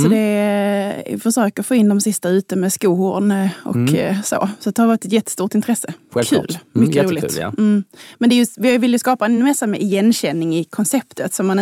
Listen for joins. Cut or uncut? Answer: uncut